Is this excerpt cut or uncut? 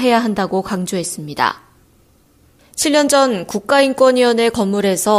uncut